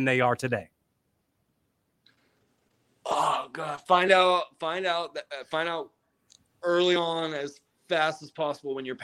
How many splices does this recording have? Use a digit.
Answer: 0